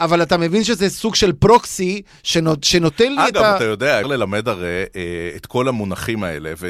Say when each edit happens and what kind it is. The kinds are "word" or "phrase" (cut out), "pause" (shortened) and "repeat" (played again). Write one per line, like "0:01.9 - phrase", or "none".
0:04.0 - word